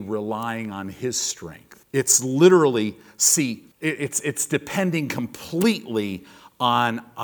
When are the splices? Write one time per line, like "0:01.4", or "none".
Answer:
0:01.8
0:03.7